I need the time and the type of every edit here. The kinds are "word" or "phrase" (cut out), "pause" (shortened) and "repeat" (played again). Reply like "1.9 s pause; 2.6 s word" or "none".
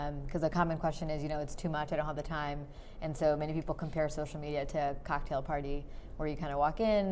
none